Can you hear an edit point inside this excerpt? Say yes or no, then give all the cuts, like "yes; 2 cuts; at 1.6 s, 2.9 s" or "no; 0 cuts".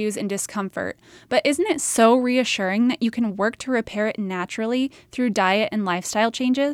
no; 0 cuts